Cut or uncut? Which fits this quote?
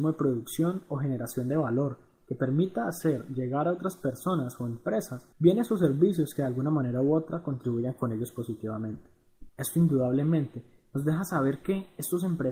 cut